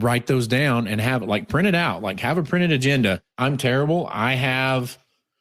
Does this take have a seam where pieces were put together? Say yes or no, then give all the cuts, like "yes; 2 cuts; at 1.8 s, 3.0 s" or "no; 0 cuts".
no; 0 cuts